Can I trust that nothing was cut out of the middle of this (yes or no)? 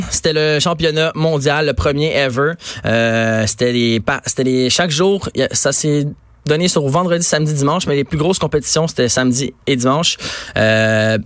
yes